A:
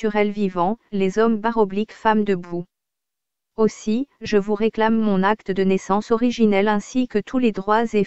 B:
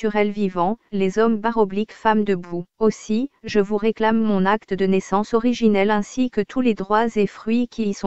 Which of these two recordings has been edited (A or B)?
B